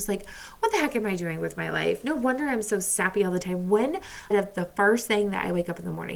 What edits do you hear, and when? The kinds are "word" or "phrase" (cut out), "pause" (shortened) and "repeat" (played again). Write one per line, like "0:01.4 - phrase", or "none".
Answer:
0:04.3 - word